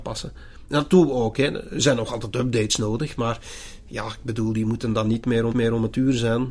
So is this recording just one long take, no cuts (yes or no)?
no